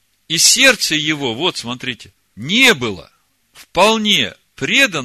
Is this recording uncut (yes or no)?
no